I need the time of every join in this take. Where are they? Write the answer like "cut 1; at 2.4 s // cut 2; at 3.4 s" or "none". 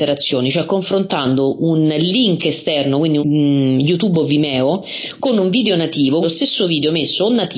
cut 1; at 3.2 s // cut 2; at 6.2 s